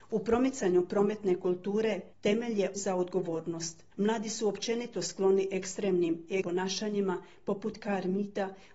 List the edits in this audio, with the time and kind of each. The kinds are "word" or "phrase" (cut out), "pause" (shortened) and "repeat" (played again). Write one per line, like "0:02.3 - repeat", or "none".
0:02.1 - pause
0:02.7 - word
0:03.9 - pause
0:06.4 - word